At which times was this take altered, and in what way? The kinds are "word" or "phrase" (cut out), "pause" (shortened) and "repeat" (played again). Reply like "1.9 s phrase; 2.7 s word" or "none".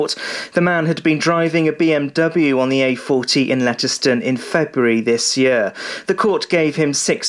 none